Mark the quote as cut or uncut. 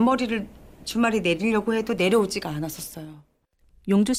uncut